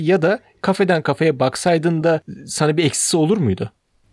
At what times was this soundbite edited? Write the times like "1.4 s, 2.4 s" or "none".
none